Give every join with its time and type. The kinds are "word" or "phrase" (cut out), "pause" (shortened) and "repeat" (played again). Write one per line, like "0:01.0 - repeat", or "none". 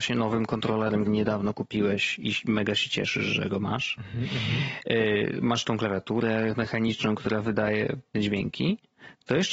0:01.1 - word
0:08.1 - word